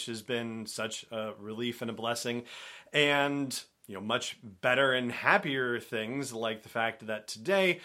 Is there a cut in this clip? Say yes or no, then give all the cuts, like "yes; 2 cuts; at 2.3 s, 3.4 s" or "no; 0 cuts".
no; 0 cuts